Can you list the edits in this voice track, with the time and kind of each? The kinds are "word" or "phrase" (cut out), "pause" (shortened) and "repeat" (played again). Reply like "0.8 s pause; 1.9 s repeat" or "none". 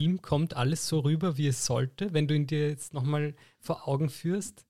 none